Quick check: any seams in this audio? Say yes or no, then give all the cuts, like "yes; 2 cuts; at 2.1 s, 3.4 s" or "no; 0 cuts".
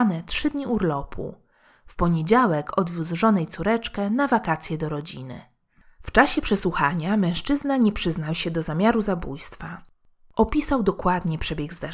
no; 0 cuts